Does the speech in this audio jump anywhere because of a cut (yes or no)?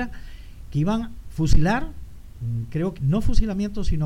yes